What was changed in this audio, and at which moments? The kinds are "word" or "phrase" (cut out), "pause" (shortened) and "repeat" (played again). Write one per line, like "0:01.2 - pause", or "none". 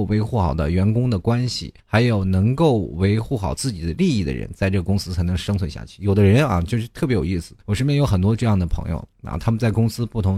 0:01.8 - pause
0:07.6 - pause